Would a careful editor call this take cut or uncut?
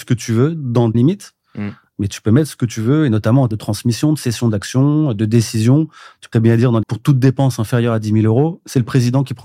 cut